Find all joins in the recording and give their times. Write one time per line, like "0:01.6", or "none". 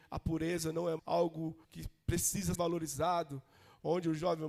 0:01.0
0:01.6
0:02.5